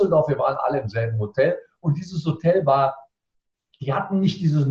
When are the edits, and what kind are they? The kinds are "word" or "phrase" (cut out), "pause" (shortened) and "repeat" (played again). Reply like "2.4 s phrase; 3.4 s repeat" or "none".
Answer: none